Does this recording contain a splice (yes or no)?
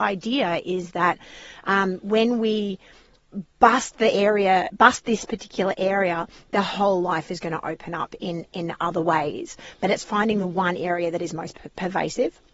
no